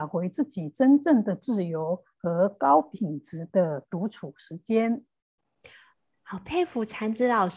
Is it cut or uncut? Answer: uncut